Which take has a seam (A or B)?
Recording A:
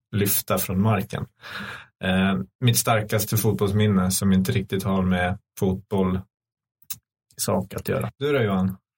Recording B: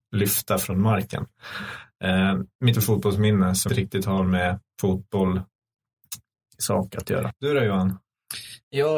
B